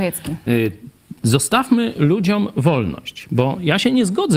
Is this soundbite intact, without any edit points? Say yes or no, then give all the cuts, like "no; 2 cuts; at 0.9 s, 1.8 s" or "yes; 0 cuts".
yes; 0 cuts